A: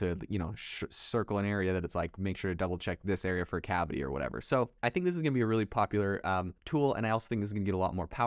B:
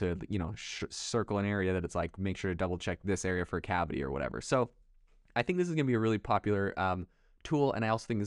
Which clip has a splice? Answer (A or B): A